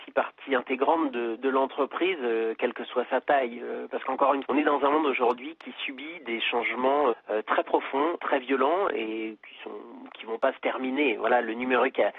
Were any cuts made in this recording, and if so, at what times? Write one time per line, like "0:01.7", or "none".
0:01.4
0:04.4
0:07.1
0:08.2

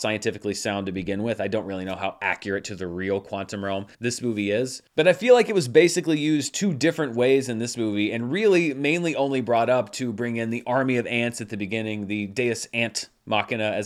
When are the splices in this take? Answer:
0:03.9

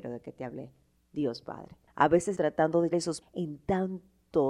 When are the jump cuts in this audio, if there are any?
0:02.4
0:02.9
0:03.2

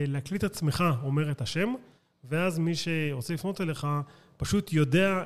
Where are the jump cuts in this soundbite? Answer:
none

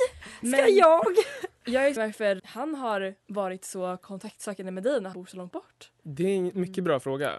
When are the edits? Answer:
0:02.0
0:02.4
0:05.1

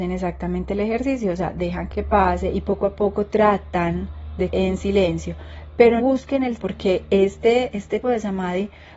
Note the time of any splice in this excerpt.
0:01.9
0:04.5
0:06.0
0:06.6
0:08.0

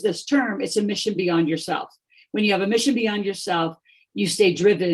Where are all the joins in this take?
none

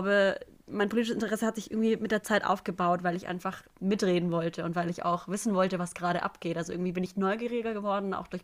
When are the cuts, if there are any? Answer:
none

